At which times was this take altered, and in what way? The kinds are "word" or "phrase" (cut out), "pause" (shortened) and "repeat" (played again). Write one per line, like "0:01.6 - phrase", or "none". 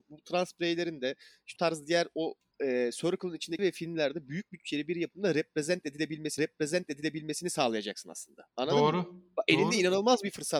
0:01.6 - word
0:02.5 - pause
0:03.6 - phrase
0:06.4 - repeat
0:08.5 - pause